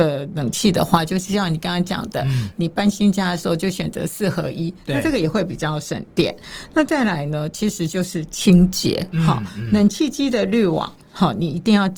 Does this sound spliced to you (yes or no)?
no